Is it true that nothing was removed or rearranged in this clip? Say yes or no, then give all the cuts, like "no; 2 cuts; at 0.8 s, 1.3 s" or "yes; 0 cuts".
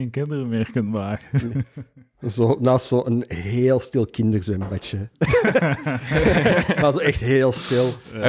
yes; 0 cuts